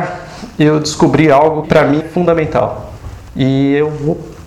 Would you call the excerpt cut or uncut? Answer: cut